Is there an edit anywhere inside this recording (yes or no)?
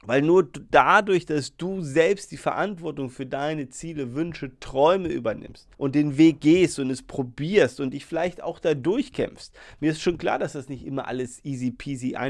yes